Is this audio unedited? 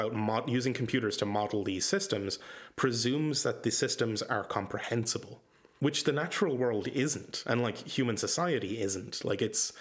yes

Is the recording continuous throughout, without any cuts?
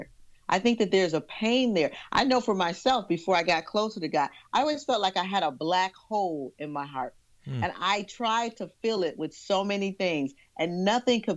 yes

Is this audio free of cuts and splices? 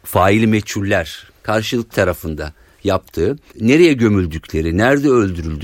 no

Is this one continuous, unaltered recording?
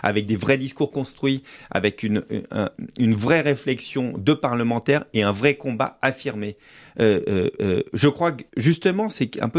no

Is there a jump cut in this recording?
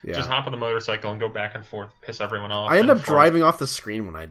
no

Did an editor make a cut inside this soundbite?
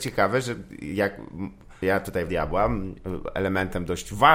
yes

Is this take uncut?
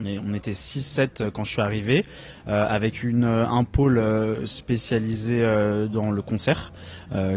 yes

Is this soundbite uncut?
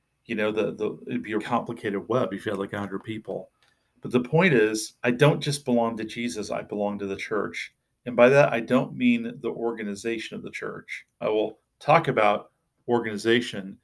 no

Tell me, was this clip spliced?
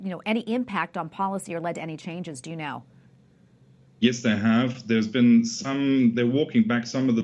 no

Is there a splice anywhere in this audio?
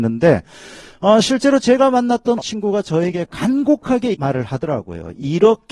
yes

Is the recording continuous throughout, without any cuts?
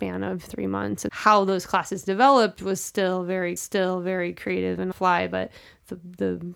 no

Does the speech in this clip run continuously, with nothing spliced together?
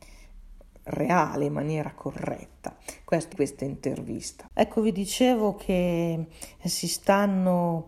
no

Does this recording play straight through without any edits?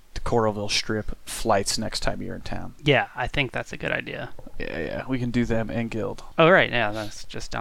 yes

